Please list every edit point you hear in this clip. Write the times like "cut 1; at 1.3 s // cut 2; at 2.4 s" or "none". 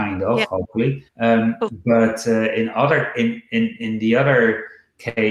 cut 1; at 1.1 s